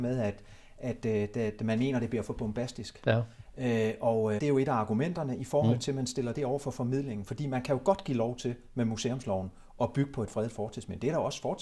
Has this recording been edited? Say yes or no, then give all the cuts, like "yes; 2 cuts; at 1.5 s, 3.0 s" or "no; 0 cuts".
yes; 1 cut; at 4.4 s